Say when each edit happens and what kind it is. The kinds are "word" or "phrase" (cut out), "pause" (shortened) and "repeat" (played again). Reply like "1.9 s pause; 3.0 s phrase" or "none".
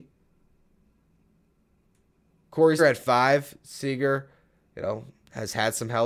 2.8 s word